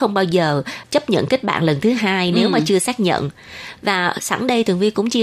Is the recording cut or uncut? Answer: uncut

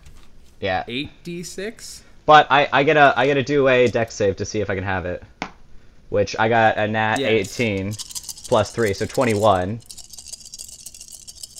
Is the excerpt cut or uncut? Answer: uncut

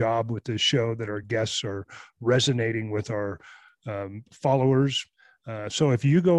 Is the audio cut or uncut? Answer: uncut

